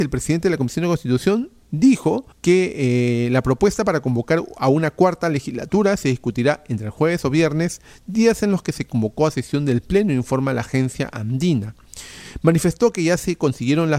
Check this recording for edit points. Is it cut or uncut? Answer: cut